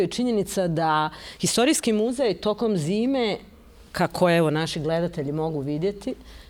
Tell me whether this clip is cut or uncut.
uncut